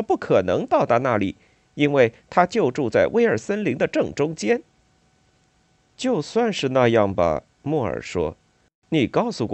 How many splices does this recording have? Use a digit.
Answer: 0